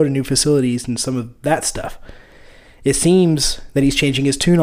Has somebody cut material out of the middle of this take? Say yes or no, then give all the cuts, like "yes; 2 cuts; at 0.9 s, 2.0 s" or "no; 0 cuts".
no; 0 cuts